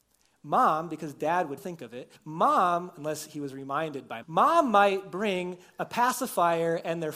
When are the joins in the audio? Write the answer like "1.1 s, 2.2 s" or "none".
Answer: 1.6 s, 2.2 s, 4.2 s